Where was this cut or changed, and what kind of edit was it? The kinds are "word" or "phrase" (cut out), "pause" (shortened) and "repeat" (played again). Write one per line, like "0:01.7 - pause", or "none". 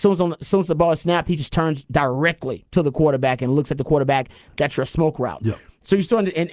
none